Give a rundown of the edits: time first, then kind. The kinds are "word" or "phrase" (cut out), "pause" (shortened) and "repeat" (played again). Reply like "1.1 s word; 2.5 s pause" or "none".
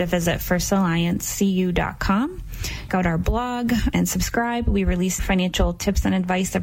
2.9 s word; 3.9 s word; 5.2 s word